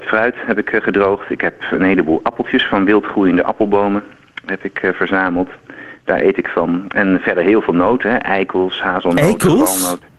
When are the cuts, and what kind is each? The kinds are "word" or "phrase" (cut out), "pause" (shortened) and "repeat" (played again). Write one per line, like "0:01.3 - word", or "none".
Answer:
none